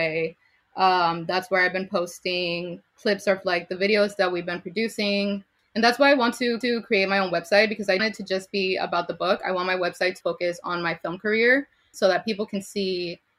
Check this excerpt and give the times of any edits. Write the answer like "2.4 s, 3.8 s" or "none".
2.9 s, 5.6 s, 6.6 s, 8.0 s, 10.2 s, 11.9 s